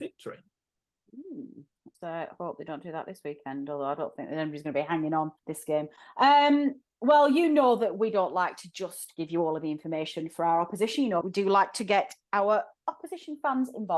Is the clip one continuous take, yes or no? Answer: no